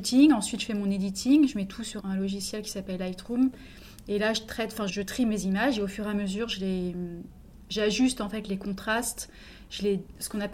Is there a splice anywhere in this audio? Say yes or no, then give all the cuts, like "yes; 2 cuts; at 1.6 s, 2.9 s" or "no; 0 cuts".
yes; 2 cuts; at 2.0 s, 4.9 s